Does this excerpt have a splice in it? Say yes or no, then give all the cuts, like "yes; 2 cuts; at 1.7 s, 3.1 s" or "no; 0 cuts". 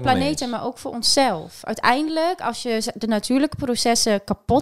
no; 0 cuts